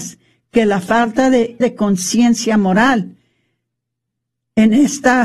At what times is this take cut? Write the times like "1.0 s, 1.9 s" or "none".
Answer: 1.6 s

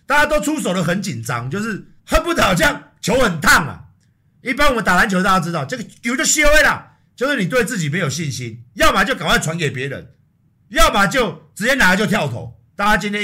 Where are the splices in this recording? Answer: 2.0 s

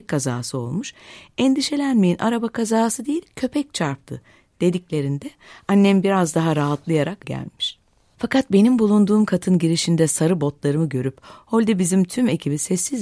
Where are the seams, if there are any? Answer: 7.2 s

